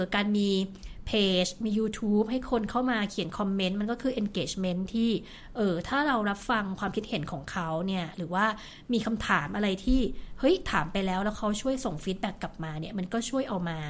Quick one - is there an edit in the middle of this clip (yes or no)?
no